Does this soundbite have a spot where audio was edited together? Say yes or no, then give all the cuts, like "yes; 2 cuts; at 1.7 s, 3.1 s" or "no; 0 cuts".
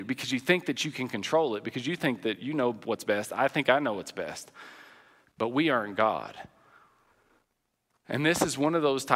no; 0 cuts